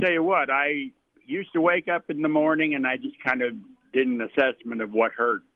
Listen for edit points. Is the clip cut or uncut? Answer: uncut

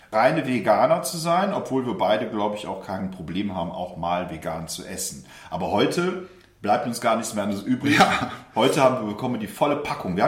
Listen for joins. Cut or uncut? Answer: uncut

